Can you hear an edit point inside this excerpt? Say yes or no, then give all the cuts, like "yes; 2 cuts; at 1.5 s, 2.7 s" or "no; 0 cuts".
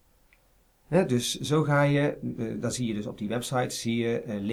no; 0 cuts